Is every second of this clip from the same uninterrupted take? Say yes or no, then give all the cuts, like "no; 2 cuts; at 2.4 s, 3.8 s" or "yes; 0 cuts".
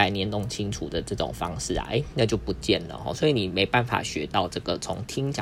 yes; 0 cuts